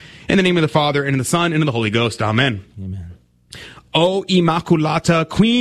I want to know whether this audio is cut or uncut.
uncut